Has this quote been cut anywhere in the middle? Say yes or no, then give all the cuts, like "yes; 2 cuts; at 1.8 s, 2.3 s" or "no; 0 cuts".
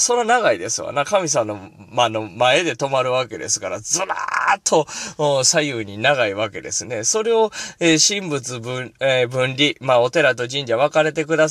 no; 0 cuts